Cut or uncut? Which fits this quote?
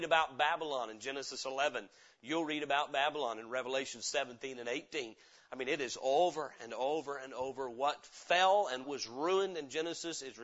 cut